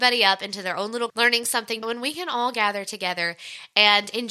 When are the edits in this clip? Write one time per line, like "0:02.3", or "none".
0:01.1
0:01.8

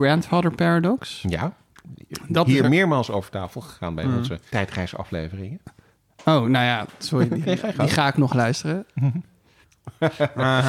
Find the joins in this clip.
0:04.5
0:07.4

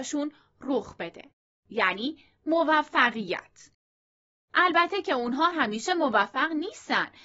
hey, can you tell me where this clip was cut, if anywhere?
0:05.5

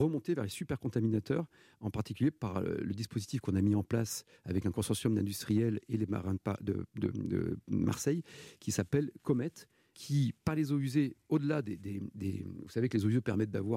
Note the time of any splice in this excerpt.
none

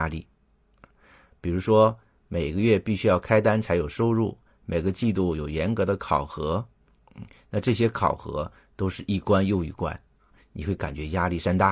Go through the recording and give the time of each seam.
none

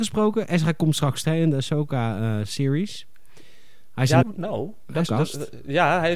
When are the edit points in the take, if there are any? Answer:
0:01.2
0:04.2
0:05.1

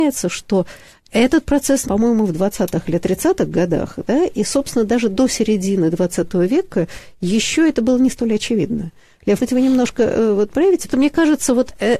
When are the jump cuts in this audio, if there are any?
0:01.8
0:09.4
0:10.9

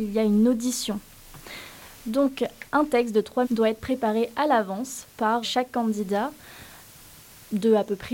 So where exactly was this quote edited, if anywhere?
0:01.9
0:03.4
0:05.4

